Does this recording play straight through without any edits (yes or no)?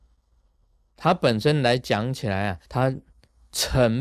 no